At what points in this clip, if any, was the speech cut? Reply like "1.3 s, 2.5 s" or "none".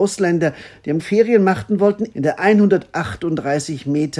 1.0 s, 2.1 s